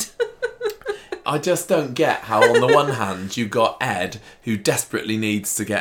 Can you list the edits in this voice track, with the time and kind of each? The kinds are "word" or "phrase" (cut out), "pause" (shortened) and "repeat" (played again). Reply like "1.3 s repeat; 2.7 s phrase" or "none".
1.2 s word